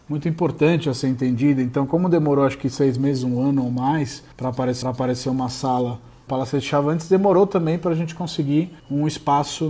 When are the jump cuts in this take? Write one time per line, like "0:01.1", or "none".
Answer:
0:04.3
0:04.8
0:06.3
0:08.8